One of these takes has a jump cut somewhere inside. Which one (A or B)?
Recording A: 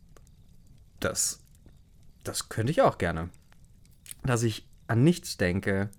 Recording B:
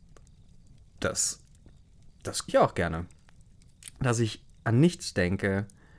B